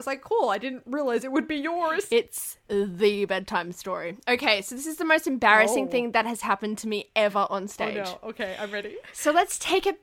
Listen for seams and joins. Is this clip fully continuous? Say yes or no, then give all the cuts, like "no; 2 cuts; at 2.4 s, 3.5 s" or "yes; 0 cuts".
no; 1 cut; at 2.6 s